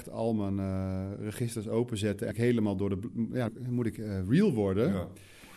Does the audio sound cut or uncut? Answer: cut